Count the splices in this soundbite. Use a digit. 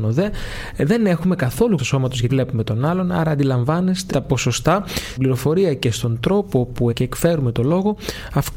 5